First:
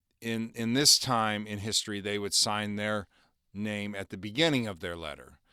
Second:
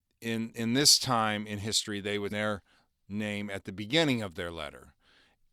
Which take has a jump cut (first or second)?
second